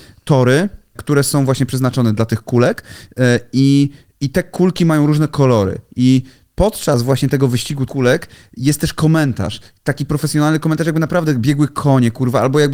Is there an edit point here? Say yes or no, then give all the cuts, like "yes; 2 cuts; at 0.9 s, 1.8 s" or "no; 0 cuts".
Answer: yes; 2 cuts; at 0.9 s, 7.9 s